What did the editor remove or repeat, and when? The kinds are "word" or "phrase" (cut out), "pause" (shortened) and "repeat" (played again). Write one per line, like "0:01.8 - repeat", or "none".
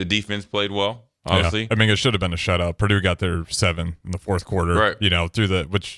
none